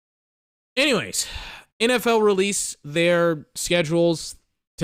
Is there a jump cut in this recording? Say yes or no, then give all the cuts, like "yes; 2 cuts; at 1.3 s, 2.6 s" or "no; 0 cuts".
yes; 1 cut; at 1.7 s